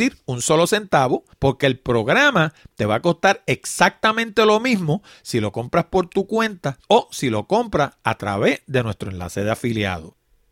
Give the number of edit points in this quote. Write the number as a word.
two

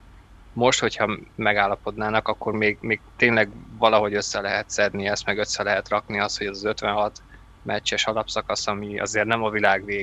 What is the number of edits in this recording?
zero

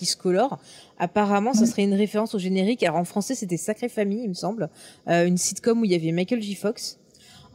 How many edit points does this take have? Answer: zero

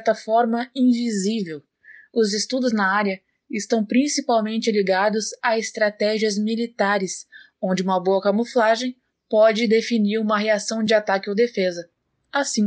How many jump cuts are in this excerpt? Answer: zero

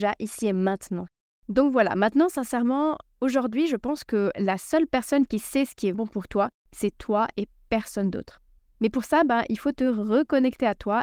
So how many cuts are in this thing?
one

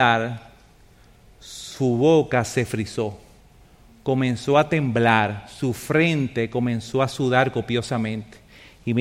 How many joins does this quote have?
zero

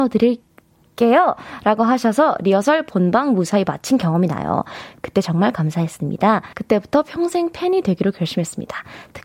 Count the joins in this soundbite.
one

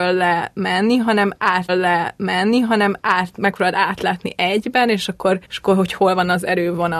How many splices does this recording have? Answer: two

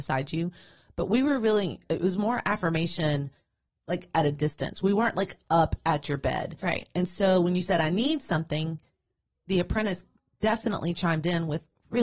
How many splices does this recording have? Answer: zero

